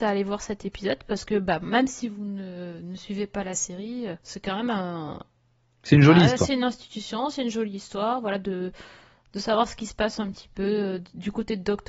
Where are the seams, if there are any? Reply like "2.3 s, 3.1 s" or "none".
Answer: 4.2 s